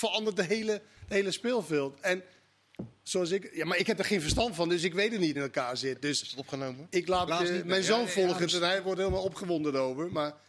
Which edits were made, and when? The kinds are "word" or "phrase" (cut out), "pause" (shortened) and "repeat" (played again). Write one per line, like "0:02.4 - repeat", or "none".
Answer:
0:05.3 - phrase
0:07.3 - phrase